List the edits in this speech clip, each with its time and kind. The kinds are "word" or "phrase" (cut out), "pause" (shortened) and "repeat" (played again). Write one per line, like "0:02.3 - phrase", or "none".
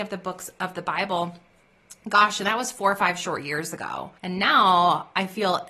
0:04.2 - pause